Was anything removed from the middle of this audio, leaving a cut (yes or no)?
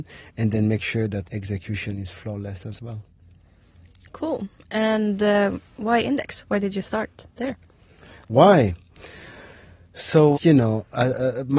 yes